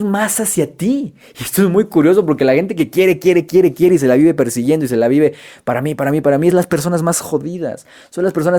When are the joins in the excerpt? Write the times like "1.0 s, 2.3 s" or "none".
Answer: none